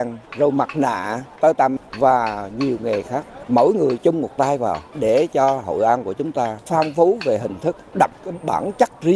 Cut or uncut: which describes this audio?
uncut